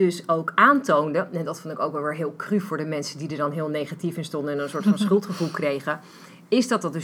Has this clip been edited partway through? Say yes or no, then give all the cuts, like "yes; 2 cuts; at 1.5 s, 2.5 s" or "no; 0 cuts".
no; 0 cuts